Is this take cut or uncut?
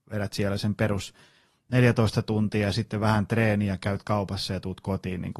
uncut